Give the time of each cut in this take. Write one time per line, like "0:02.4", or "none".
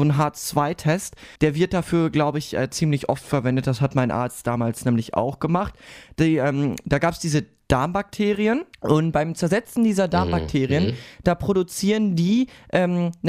0:01.4
0:08.7